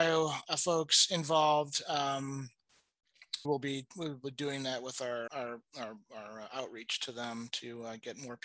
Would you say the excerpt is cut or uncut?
cut